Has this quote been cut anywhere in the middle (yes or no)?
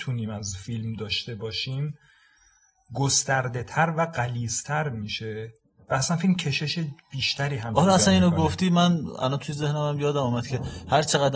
no